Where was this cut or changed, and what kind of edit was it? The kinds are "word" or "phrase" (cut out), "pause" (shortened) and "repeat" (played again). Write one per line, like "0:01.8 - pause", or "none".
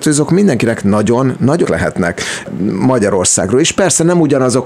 0:01.6 - word

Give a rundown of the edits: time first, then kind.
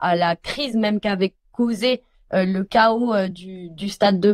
none

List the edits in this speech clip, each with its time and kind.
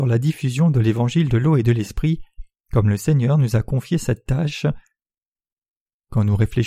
none

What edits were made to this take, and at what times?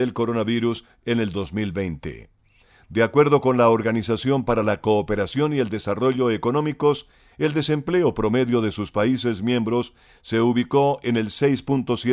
none

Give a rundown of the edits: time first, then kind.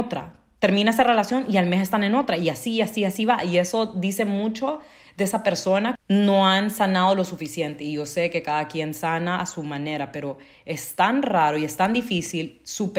none

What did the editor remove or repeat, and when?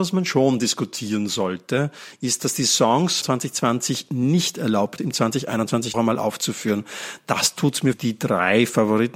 0:03.2 - word
0:05.0 - word
0:05.9 - word
0:07.9 - word

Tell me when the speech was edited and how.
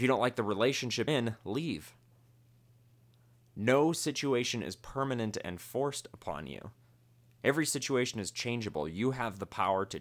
0:01.1 - word

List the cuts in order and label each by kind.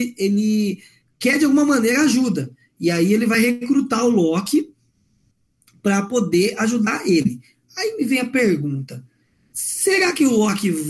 none

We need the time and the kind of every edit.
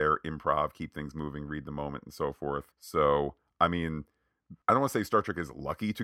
0:02.7 - pause
0:04.6 - pause

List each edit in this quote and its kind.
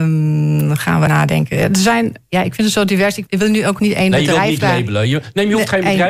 0:01.1 - word
0:03.3 - word
0:03.8 - word

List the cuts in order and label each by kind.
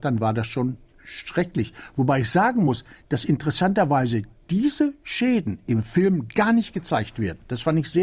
none

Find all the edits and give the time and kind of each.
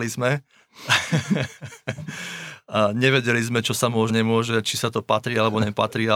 0:04.1 - phrase

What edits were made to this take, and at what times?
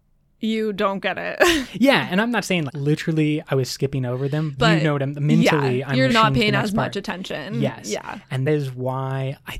0:02.7 - word
0:04.6 - word
0:06.1 - word
0:08.5 - word

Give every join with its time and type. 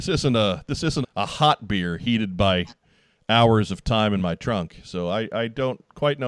0:01.0 - word

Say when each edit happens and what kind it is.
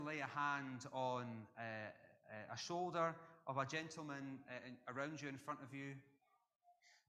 none

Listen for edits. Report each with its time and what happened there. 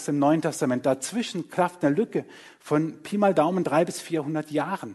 none

